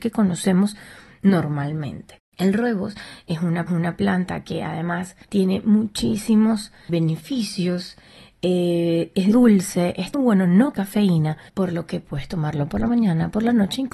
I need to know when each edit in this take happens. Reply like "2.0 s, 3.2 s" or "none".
3.7 s, 5.2 s, 6.9 s, 9.3 s, 10.1 s, 10.7 s, 11.5 s